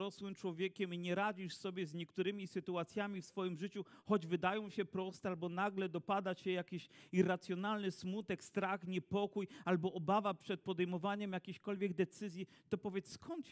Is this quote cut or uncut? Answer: uncut